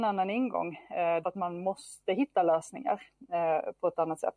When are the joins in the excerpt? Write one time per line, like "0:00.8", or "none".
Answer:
0:01.2